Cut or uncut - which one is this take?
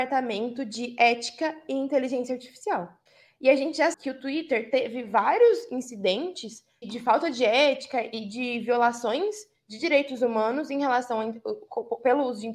cut